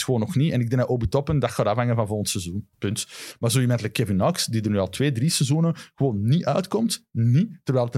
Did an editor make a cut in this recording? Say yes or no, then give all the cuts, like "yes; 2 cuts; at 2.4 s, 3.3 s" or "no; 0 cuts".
yes; 1 cut; at 2.7 s